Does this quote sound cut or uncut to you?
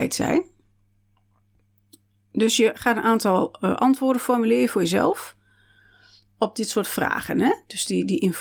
uncut